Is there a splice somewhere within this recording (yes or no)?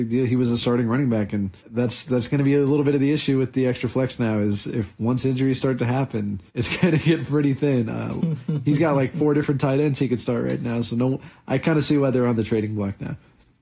yes